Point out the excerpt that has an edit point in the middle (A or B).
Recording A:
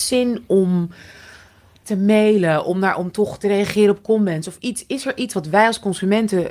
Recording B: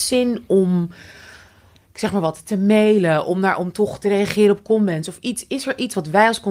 A